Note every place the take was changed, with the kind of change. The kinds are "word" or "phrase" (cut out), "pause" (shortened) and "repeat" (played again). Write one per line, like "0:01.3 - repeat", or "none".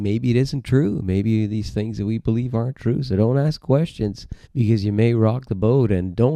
0:04.4 - pause